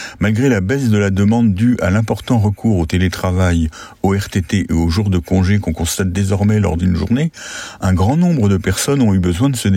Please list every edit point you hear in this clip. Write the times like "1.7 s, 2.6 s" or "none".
6.8 s